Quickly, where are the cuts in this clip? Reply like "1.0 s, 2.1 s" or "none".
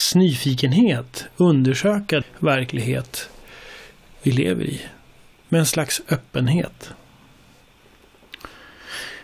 2.2 s

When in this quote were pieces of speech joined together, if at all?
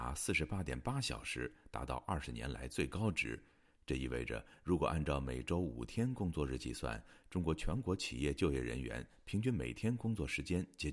none

